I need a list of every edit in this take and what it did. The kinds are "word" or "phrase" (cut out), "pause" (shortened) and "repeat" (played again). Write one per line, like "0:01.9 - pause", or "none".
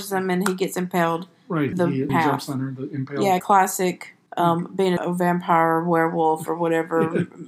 0:01.7 - word
0:02.1 - word
0:03.4 - phrase
0:04.3 - pause
0:05.0 - phrase